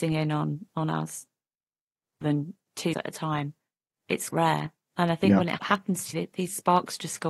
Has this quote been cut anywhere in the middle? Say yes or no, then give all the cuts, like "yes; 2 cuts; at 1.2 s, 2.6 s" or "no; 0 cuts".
yes; 5 cuts; at 2.2 s, 2.9 s, 4.3 s, 5.6 s, 6.1 s